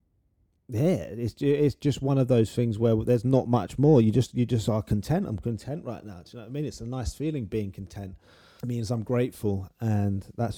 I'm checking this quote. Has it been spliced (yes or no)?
no